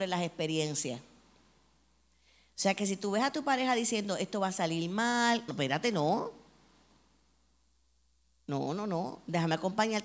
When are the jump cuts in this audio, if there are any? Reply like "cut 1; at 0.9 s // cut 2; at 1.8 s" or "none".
cut 1; at 5.5 s